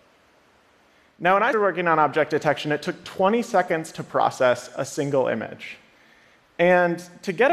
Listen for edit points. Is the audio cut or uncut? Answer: cut